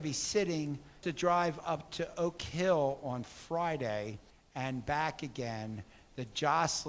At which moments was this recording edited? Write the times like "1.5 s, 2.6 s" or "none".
1.0 s, 4.3 s

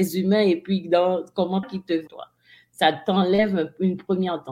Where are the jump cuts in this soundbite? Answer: 1.6 s, 2.1 s

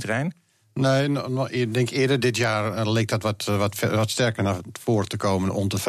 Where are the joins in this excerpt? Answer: none

